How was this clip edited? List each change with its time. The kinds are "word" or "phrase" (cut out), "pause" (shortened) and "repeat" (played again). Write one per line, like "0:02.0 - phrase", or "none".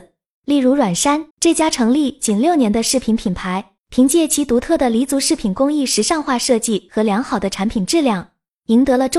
0:01.3 - pause
0:03.8 - pause